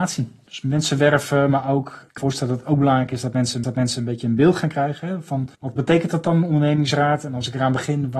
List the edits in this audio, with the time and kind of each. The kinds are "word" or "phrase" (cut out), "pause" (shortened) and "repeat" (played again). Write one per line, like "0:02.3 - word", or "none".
0:02.2 - word
0:03.6 - repeat
0:05.5 - pause